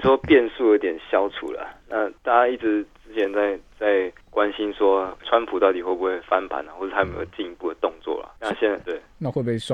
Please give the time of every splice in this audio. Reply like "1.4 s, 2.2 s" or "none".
2.2 s, 4.2 s, 5.2 s, 8.4 s, 8.8 s